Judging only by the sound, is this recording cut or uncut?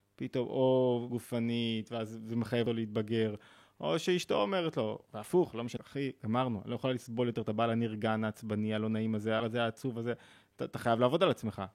cut